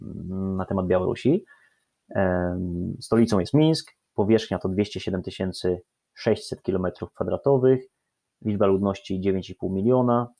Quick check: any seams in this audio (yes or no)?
no